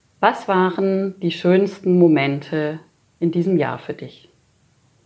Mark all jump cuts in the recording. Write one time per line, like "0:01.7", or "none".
none

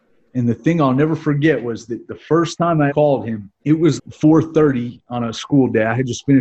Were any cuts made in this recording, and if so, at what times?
0:02.9
0:03.6
0:04.0

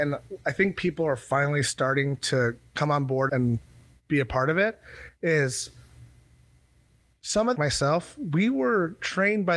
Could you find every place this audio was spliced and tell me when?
0:03.3
0:07.5

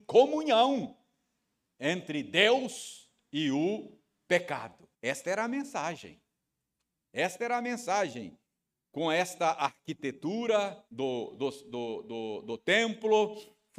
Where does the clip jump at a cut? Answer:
0:04.9
0:10.9

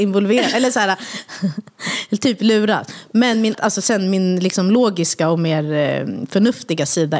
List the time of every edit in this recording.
0:03.5

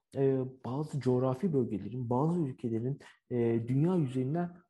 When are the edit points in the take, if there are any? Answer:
none

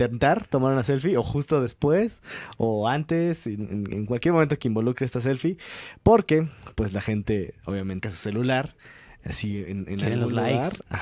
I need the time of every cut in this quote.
0:08.0

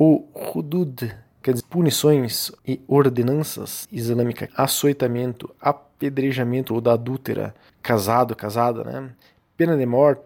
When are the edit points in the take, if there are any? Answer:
0:01.6
0:02.6
0:03.8
0:04.5
0:06.7
0:07.7

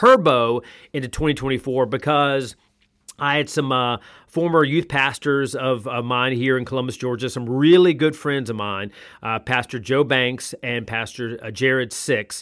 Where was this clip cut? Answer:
none

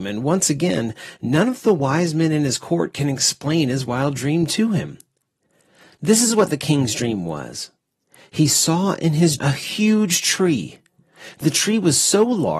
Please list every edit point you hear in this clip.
0:09.4

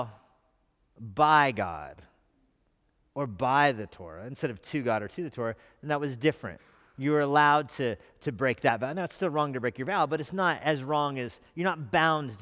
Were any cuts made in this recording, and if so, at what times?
none

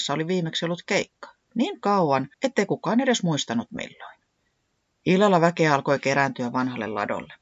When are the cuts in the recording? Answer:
0:01.4
0:02.3
0:04.4

